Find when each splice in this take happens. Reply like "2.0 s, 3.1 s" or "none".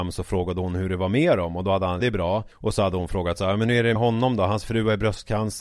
2.0 s, 2.5 s, 4.0 s